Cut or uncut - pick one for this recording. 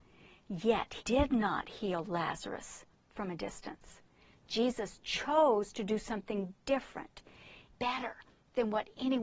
cut